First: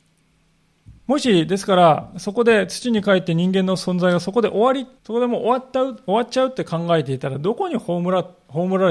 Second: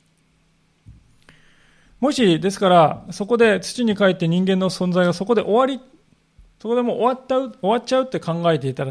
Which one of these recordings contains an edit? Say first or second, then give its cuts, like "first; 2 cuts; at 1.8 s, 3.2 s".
first; 2 cuts; at 1.0 s, 5.0 s